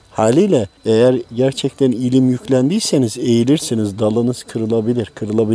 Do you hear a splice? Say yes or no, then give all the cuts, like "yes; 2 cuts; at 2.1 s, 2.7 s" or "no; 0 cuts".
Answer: no; 0 cuts